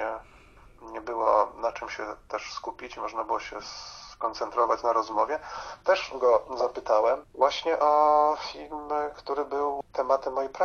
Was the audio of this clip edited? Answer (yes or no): no